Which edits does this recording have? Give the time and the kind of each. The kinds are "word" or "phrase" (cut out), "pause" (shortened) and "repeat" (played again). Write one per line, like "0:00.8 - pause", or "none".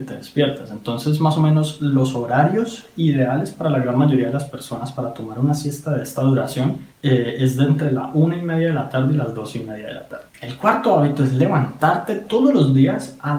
0:06.9 - pause
0:10.3 - pause